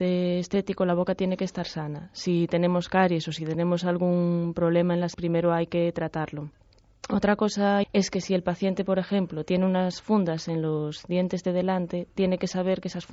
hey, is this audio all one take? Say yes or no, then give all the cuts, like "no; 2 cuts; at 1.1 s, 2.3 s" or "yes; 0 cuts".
no; 2 cuts; at 5.1 s, 7.8 s